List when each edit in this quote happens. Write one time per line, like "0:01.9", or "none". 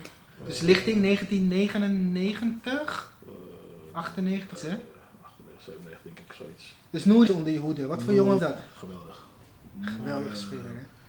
0:04.6
0:07.3
0:08.4